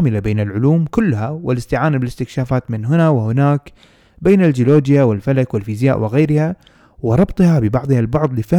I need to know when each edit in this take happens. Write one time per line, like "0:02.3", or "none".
none